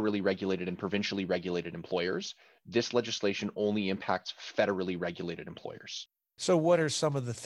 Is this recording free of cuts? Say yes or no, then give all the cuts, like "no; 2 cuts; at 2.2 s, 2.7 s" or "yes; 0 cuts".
yes; 0 cuts